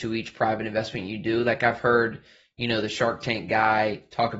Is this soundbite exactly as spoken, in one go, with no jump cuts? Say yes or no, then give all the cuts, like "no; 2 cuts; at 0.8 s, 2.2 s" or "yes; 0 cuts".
yes; 0 cuts